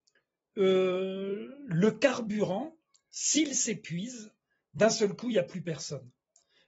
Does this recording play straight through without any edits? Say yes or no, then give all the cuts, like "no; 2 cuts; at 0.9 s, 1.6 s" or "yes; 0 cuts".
yes; 0 cuts